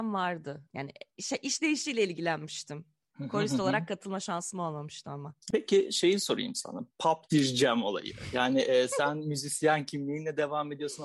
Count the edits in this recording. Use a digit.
0